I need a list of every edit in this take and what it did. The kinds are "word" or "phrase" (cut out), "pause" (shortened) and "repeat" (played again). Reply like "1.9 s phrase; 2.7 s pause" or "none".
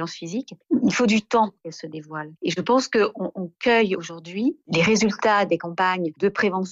none